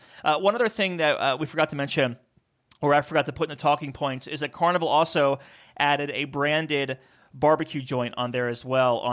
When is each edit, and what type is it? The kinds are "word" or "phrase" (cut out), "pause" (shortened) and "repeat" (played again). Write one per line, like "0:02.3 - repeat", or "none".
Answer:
none